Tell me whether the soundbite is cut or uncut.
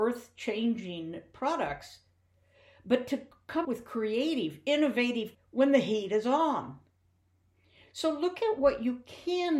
cut